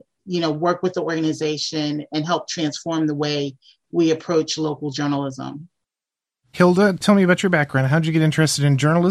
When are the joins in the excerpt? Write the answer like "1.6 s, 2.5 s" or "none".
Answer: none